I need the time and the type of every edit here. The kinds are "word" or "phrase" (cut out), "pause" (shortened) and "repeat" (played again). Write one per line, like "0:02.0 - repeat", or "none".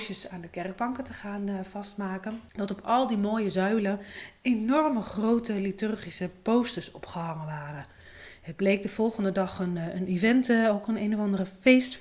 0:02.5 - pause

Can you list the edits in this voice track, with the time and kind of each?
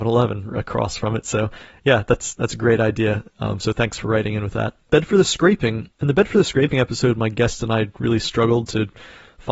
0:04.8 - pause
0:05.9 - pause

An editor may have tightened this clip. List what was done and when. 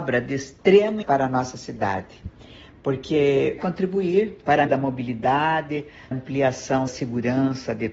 0:01.0 - word
0:03.6 - word
0:04.7 - word
0:06.1 - word
0:06.9 - word

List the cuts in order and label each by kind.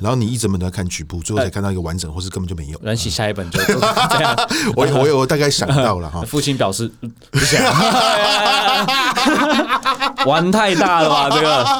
0:02.8 - phrase

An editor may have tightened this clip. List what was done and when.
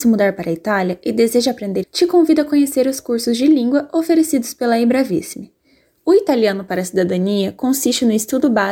0:01.8 - word

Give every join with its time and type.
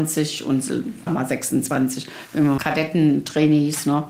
0:01.1 - word
0:02.6 - phrase

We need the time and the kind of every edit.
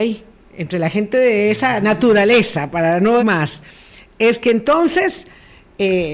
0:03.2 - word

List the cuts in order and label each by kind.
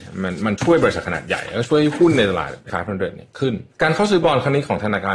0:02.7 - word
0:03.7 - pause

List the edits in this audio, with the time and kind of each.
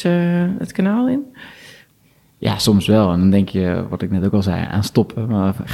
0:02.0 - pause

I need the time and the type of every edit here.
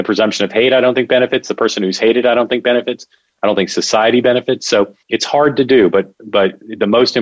0:05.0 - pause

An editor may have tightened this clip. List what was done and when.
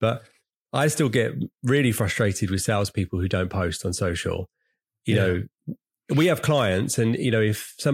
0:01.5 - pause

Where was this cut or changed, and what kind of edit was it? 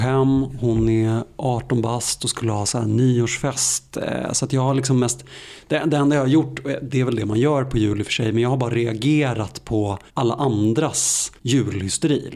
0:10.1 - pause
0:11.4 - pause

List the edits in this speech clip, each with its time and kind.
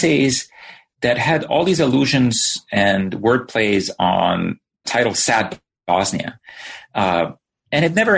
0:04.8 - word

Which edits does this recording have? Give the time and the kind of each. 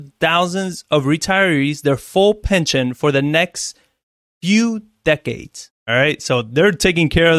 0:05.8 - pause

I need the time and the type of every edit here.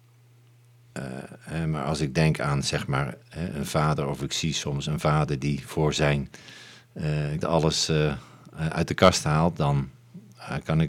0:03.2 - pause
0:07.4 - word

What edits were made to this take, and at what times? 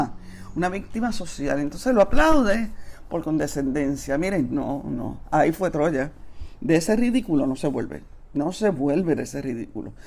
none

